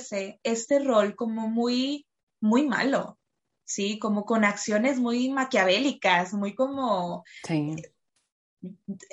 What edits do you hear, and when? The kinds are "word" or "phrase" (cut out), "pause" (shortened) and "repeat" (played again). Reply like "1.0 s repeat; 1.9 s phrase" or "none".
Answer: none